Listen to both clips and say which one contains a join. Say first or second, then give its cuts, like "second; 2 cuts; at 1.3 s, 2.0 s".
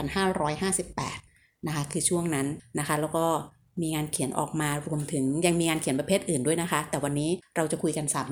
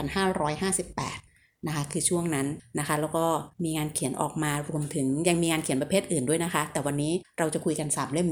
second; 1 cut; at 3.5 s